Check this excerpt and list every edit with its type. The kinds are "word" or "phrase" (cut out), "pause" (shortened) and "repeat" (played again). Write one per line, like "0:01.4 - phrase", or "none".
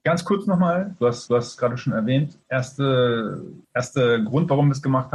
0:01.3 - repeat
0:03.6 - pause